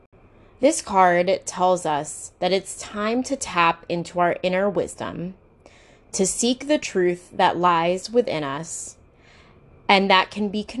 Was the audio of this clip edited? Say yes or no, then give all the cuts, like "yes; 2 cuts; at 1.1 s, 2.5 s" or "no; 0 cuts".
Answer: no; 0 cuts